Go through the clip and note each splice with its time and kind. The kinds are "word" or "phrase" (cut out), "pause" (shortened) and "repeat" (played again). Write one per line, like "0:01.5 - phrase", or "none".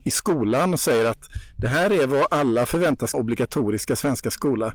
0:03.1 - phrase